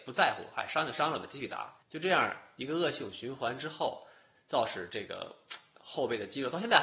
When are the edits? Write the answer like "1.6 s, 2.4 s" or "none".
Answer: 1.8 s